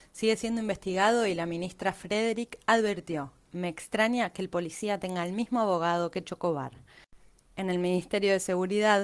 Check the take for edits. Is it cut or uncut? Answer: uncut